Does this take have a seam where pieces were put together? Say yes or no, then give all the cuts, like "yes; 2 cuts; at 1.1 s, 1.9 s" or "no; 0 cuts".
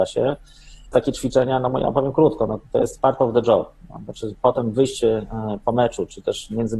yes; 1 cut; at 0.9 s